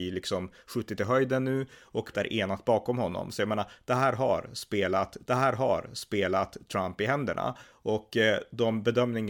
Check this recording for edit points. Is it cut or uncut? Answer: cut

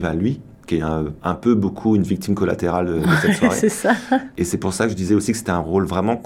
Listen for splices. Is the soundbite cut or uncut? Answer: uncut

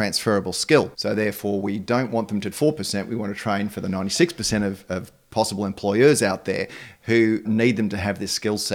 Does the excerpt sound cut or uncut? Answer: cut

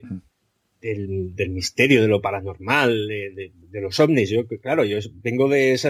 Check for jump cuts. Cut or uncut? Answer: uncut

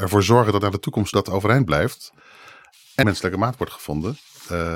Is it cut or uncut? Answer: cut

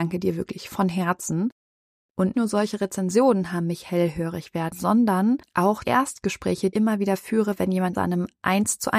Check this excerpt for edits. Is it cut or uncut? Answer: cut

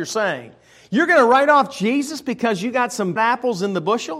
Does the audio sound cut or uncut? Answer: cut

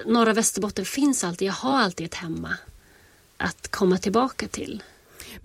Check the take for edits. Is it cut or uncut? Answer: uncut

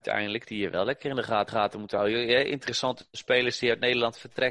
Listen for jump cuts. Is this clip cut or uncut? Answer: cut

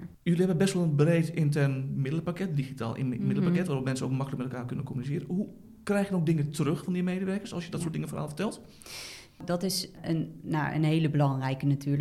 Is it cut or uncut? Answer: uncut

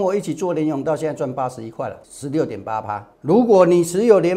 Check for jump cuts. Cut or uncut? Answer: cut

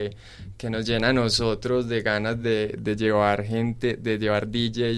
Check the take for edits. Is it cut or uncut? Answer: uncut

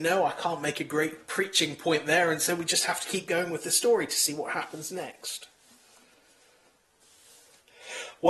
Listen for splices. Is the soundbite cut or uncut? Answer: uncut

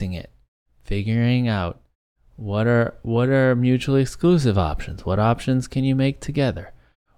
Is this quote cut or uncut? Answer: uncut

